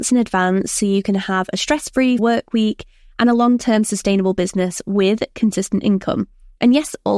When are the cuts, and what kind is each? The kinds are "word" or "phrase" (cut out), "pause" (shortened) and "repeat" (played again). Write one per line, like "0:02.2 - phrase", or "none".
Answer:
0:02.2 - word